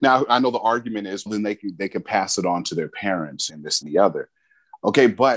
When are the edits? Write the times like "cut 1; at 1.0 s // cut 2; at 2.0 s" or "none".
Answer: cut 1; at 1.3 s // cut 2; at 3.5 s // cut 3; at 3.8 s